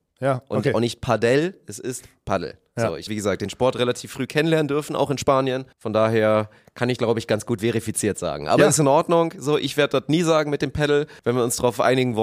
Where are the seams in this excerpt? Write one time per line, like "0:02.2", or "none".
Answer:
0:03.1
0:05.7
0:07.0
0:11.2